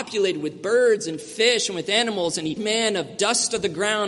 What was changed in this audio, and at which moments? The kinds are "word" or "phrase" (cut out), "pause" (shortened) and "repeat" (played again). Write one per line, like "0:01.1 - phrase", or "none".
0:02.6 - word